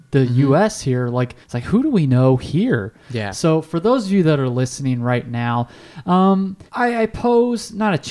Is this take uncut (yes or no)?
no